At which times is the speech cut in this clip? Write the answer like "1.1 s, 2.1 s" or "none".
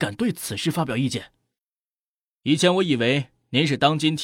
none